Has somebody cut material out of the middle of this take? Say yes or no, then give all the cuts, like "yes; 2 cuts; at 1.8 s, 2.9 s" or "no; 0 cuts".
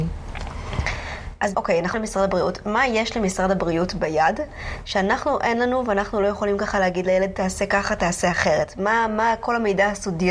yes; 2 cuts; at 1.5 s, 1.9 s